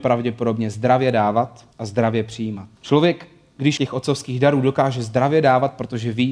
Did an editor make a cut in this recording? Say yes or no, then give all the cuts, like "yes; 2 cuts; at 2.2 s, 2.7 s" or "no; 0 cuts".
yes; 3 cuts; at 1.7 s, 2.7 s, 3.8 s